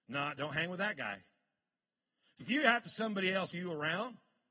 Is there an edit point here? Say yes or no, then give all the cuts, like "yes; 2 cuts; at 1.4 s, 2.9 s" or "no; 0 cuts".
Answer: yes; 3 cuts; at 2.4 s, 2.9 s, 3.5 s